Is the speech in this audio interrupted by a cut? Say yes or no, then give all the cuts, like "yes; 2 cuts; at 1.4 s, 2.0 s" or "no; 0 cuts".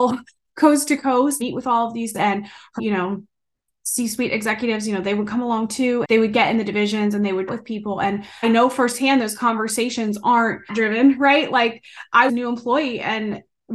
yes; 8 cuts; at 1.4 s, 2.1 s, 2.8 s, 6.0 s, 7.5 s, 8.4 s, 10.7 s, 12.3 s